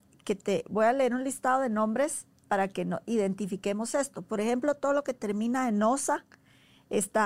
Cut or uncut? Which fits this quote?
uncut